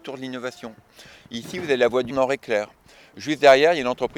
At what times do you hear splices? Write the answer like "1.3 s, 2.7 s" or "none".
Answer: 2.1 s